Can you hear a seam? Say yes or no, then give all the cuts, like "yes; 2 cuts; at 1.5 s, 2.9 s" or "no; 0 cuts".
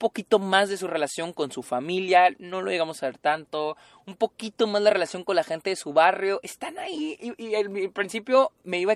no; 0 cuts